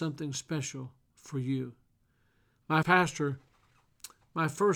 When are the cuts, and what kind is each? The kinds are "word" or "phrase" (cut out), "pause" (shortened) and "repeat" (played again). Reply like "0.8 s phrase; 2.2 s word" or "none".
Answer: 1.0 s pause; 2.8 s word